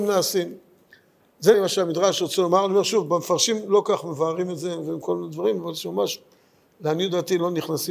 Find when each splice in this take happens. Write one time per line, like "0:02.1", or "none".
0:01.5